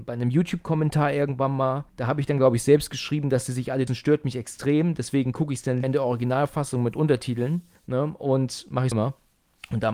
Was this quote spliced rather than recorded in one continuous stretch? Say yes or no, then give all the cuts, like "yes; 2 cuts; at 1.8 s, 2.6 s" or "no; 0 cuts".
yes; 5 cuts; at 1.9 s, 3.9 s, 5.8 s, 7.7 s, 8.9 s